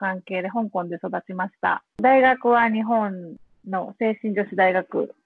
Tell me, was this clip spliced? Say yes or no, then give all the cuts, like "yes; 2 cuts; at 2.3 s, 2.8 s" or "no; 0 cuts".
no; 0 cuts